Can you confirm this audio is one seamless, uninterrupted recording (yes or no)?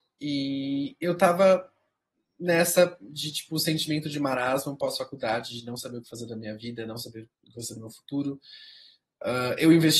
no